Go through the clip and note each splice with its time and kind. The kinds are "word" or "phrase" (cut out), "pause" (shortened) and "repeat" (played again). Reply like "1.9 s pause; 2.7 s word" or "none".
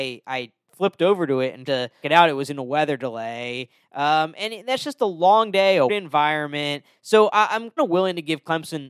1.7 s word; 2.0 s word; 5.9 s word; 7.8 s word